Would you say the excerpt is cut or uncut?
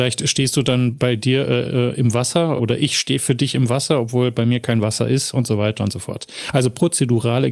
cut